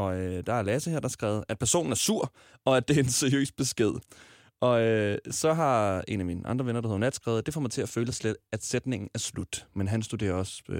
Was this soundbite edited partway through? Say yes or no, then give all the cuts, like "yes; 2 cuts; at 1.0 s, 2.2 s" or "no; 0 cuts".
no; 0 cuts